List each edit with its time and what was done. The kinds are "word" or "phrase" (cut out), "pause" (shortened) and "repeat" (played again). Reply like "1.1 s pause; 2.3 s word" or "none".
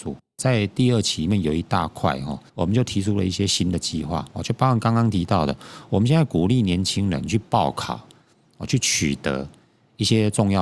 2.5 s pause